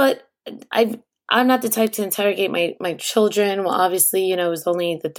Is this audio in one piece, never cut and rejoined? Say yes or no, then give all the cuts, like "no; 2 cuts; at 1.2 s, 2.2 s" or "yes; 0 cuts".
yes; 0 cuts